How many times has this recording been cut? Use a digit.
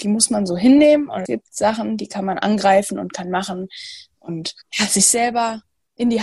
2